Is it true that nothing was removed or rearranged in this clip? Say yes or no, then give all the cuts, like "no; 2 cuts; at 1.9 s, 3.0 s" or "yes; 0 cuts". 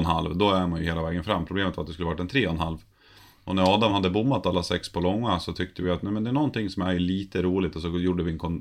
yes; 0 cuts